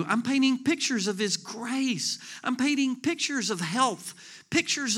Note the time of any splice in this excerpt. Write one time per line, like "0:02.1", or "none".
none